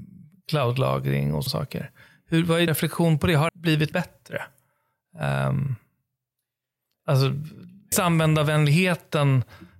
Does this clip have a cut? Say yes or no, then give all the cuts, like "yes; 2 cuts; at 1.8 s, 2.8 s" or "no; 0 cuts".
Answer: yes; 5 cuts; at 1.5 s, 2.7 s, 3.5 s, 3.9 s, 7.9 s